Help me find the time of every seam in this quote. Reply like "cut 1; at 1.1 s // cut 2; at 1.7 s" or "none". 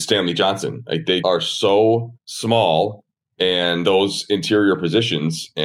cut 1; at 1.2 s // cut 2; at 2.2 s // cut 3; at 3.8 s